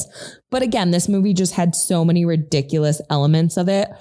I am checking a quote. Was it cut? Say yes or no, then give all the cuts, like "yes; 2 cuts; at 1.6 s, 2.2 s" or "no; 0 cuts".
no; 0 cuts